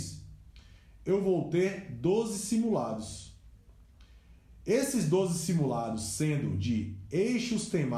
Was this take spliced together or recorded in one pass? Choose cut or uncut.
uncut